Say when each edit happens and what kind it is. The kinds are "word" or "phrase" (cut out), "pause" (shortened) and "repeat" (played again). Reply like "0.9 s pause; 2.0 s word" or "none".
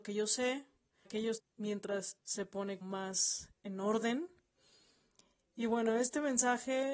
1.0 s word; 1.4 s phrase; 2.2 s word; 2.8 s word